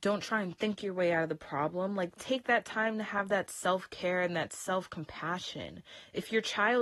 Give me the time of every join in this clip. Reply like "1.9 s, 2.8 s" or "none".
none